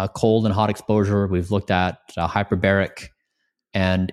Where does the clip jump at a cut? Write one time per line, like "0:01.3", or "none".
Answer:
none